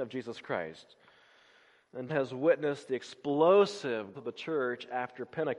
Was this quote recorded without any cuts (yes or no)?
no